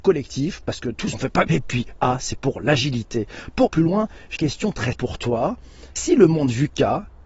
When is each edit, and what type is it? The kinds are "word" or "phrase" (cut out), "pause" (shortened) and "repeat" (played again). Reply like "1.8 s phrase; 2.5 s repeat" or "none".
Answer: 1.1 s word; 1.5 s word; 3.7 s word; 4.4 s word; 4.9 s word; 6.0 s word